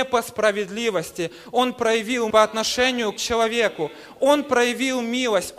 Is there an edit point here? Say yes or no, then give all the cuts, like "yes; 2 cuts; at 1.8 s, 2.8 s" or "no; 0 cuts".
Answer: yes; 2 cuts; at 2.3 s, 3.2 s